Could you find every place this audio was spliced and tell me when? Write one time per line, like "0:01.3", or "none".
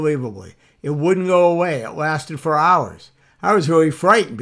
none